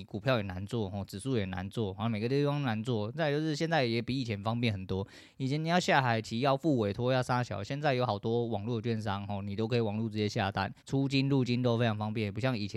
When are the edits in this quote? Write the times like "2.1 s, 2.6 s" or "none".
10.8 s